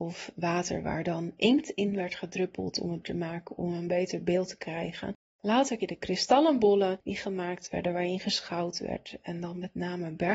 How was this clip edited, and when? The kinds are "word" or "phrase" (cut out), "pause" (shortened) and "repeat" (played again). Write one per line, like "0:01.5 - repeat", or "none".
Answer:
0:03.0 - word
0:05.8 - word

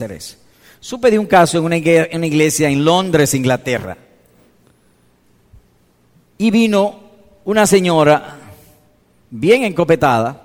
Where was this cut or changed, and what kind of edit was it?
none

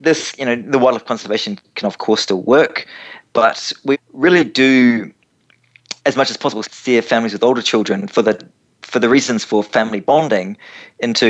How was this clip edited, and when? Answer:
0:03.9 - word
0:06.0 - pause
0:06.6 - word

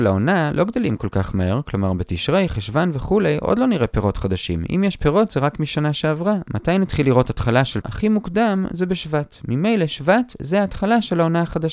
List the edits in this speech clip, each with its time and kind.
0:07.8 - phrase

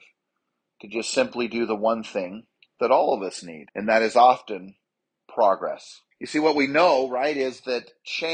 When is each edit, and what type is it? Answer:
0:02.5 - pause
0:03.7 - pause
0:06.1 - pause

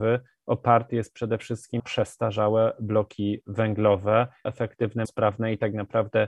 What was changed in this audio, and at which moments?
0:01.8 - word
0:04.4 - word
0:05.0 - word

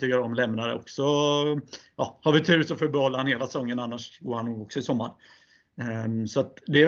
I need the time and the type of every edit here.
none

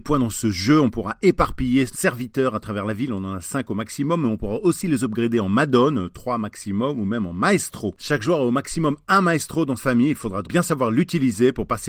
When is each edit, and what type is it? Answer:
0:01.9 - word
0:09.8 - word
0:10.4 - word

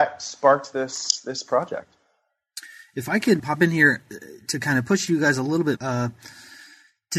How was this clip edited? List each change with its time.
0:03.4 - word
0:05.8 - word

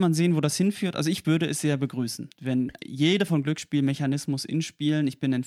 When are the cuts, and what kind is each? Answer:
0:01.2 - word
0:02.3 - pause
0:03.3 - word

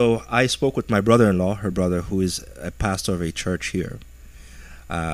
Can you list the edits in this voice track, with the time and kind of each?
none

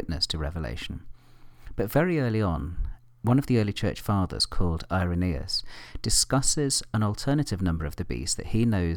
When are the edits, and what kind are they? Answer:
none

